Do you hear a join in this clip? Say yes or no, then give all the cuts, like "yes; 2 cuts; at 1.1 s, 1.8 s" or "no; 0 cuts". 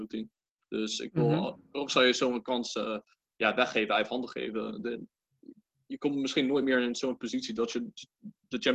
no; 0 cuts